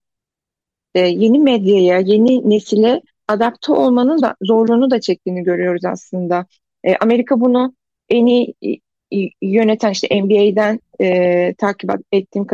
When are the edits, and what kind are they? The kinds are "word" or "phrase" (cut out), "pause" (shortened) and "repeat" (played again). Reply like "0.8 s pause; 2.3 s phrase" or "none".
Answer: 4.2 s word